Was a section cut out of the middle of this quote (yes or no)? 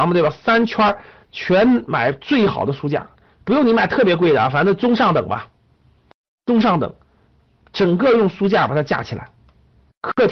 no